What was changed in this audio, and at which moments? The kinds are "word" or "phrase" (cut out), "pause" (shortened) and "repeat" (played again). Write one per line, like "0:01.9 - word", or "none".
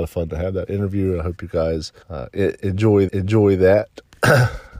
0:02.0 - pause
0:03.1 - repeat